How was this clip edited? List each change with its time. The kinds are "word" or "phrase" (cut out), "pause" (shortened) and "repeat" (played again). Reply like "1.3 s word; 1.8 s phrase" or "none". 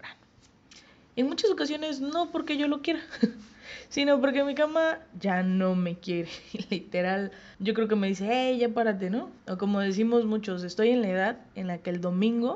7.5 s pause; 9.4 s pause